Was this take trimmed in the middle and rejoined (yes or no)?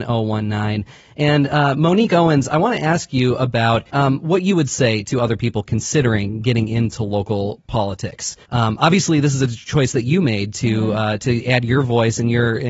yes